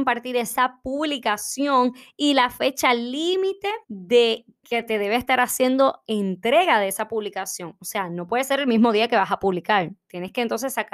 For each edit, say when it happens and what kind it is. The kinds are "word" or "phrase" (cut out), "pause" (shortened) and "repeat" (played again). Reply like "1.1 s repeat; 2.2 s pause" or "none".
3.8 s pause